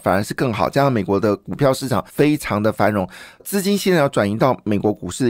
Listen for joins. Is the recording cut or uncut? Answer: cut